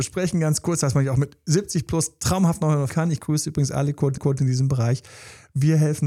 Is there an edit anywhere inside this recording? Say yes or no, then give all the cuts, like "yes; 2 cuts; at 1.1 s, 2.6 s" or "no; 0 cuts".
yes; 2 cuts; at 2.9 s, 4.2 s